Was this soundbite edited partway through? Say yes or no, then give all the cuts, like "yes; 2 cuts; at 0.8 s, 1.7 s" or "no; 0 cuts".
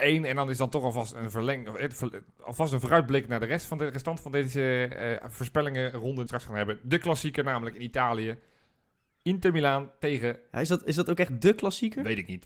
yes; 1 cut; at 6.3 s